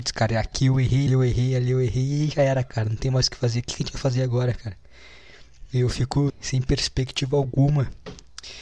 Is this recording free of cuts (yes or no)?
no